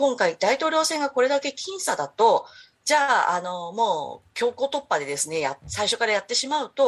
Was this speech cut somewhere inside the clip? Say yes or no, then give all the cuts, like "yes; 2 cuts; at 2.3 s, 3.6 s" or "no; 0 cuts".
no; 0 cuts